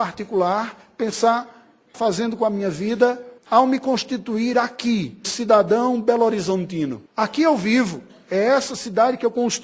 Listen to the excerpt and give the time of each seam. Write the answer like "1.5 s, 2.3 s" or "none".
1.9 s, 3.4 s, 5.2 s, 7.1 s

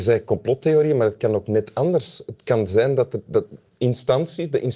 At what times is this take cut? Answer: none

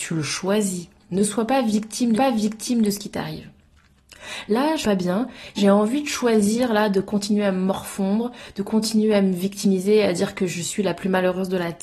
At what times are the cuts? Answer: 2.2 s, 4.8 s, 5.6 s

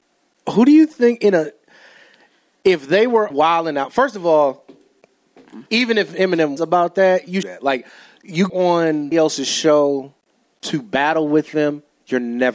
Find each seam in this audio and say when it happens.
3.3 s, 5.7 s, 6.6 s, 7.4 s, 8.5 s, 9.1 s

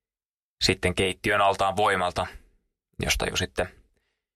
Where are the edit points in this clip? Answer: none

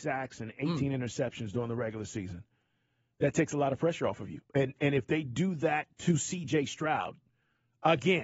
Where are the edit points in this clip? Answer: 4.5 s

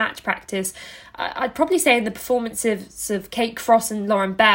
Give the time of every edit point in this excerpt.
none

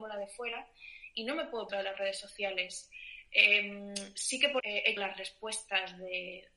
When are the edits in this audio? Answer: 1.7 s, 4.6 s, 5.0 s

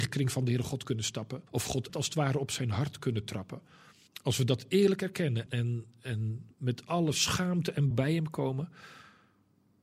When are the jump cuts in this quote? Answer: 1.5 s, 1.9 s, 4.1 s, 5.5 s, 6.5 s, 7.9 s

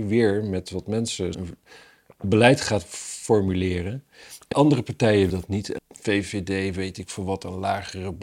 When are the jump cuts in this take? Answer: 1.3 s, 4.5 s, 5.3 s, 5.8 s

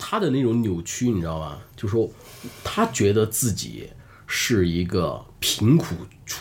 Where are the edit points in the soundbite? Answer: none

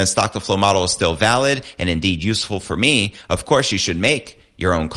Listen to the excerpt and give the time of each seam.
none

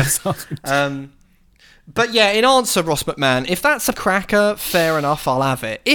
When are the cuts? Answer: 3.9 s

